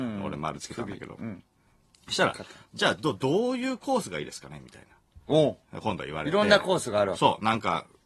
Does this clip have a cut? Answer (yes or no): no